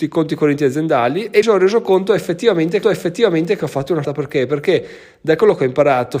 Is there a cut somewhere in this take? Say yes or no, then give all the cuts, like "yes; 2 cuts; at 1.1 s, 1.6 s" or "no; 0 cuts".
yes; 3 cuts; at 1.4 s, 2.8 s, 4.0 s